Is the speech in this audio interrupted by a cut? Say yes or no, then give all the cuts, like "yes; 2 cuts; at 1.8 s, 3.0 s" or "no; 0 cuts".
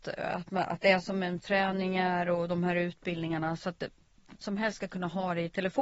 yes; 2 cuts; at 1.4 s, 4.4 s